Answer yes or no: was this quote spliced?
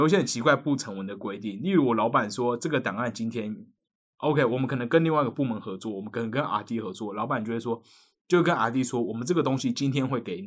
no